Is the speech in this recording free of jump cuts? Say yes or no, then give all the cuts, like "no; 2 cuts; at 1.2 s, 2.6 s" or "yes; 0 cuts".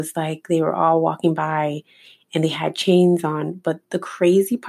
yes; 0 cuts